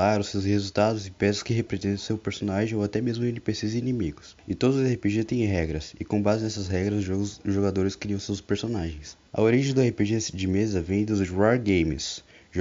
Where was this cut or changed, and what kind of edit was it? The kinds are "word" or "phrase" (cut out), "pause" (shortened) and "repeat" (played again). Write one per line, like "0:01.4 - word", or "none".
0:04.4 - pause
0:09.3 - pause

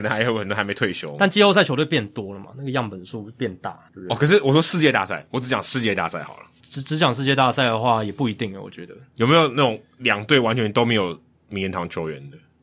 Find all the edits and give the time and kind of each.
0:03.9 - pause

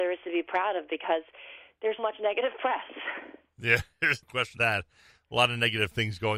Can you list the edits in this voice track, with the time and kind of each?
0:02.0 - word
0:04.2 - word
0:04.6 - word

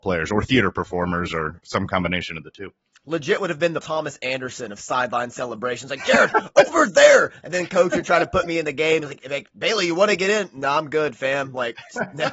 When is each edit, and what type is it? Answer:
0:03.8 - word

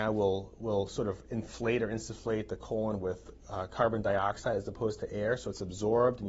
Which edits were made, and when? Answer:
none

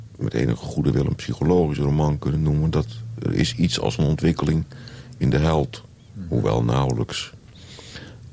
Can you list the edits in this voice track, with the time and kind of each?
none

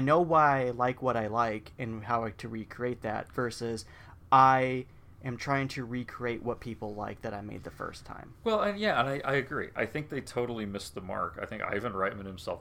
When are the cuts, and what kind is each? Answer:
none

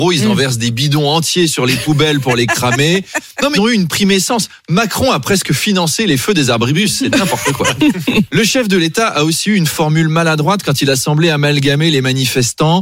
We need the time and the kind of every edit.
0:03.5 - word

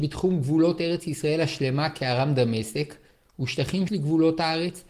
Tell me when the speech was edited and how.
0:03.9 - word

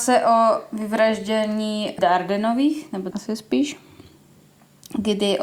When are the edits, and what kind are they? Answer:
0:02.0 - word
0:03.1 - word

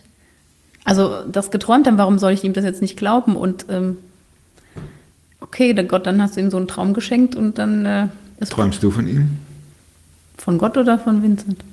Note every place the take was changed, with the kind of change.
none

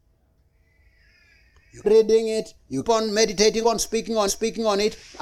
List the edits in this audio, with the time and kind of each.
0:01.8 - phrase
0:02.8 - word
0:03.6 - phrase
0:04.3 - repeat

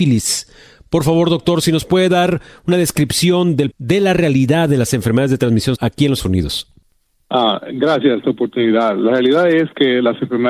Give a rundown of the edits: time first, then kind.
0:03.7 - word
0:05.8 - word
0:06.2 - word
0:08.2 - phrase

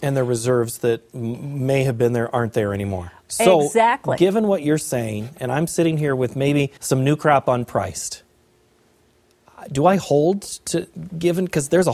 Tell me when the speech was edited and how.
0:06.8 - pause

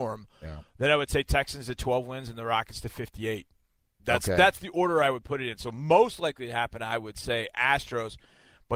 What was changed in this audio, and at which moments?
none

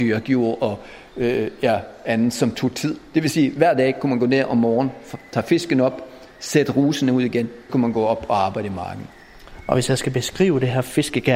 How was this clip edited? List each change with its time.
0:07.7 - word

